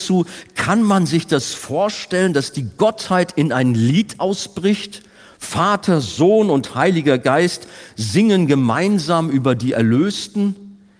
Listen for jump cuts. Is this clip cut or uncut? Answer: uncut